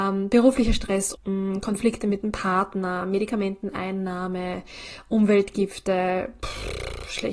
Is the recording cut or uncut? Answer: cut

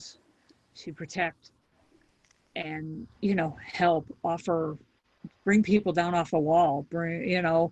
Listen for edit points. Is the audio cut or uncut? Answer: cut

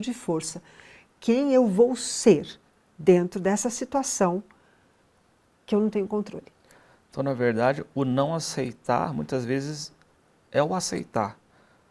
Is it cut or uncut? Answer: uncut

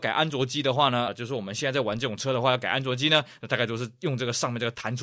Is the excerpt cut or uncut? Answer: cut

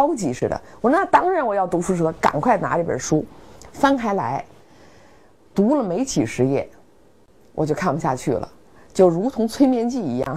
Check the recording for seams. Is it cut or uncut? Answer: uncut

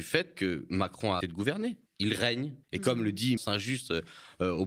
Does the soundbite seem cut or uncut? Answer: cut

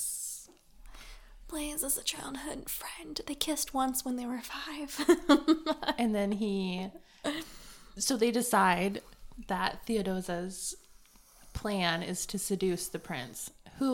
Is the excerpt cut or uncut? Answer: uncut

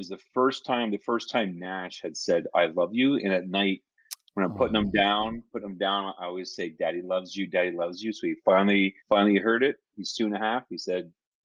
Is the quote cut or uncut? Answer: cut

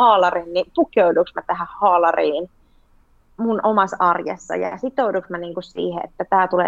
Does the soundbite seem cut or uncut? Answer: uncut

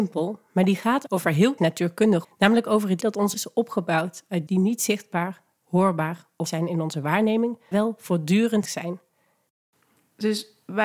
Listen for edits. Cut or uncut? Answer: cut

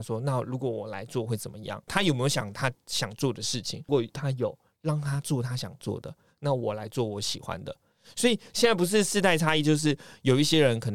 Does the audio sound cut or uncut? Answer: uncut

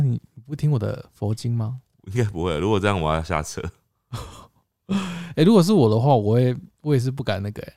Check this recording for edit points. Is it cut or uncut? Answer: uncut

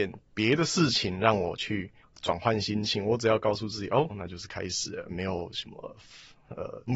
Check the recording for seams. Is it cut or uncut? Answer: cut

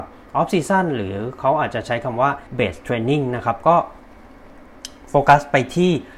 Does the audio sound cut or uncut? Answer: cut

